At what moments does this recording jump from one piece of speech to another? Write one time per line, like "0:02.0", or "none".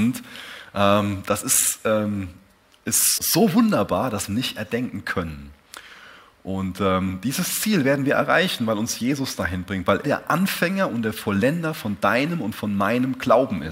0:03.2
0:04.3
0:10.0